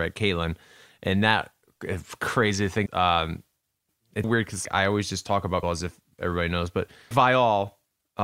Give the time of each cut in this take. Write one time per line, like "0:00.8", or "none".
0:02.9
0:04.2
0:04.6
0:05.6
0:07.1